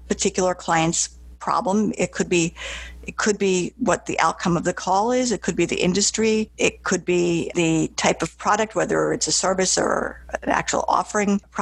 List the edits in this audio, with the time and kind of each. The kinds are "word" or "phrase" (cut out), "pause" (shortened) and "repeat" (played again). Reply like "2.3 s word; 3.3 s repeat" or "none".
none